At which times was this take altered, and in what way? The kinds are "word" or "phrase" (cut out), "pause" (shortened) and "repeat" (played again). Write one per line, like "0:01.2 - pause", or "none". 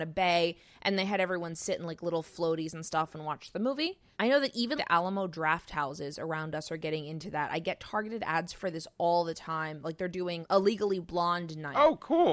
0:04.8 - word